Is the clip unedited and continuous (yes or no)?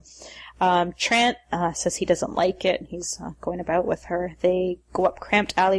yes